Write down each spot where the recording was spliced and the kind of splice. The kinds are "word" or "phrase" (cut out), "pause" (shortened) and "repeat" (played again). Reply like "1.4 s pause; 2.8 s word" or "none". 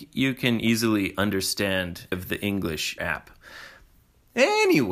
2.1 s word; 3.0 s phrase